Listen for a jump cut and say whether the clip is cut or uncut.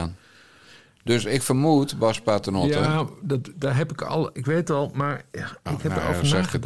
uncut